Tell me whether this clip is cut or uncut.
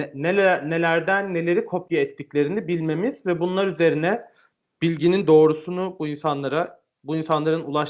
uncut